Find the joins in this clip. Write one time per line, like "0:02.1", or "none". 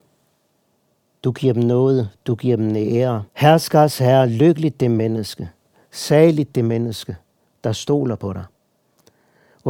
0:03.3